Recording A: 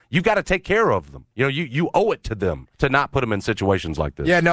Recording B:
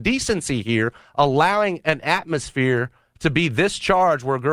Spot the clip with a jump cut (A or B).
A